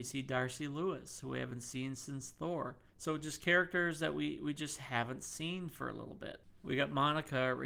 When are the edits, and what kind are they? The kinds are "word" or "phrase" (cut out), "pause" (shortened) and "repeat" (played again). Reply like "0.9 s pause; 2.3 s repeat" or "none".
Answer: 2.9 s pause